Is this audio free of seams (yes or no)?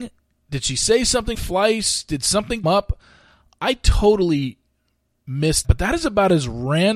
no